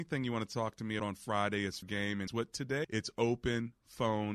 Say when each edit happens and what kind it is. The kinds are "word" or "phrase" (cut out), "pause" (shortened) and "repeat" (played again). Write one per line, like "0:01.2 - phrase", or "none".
0:01.0 - word
0:01.8 - word
0:02.3 - word
0:02.8 - word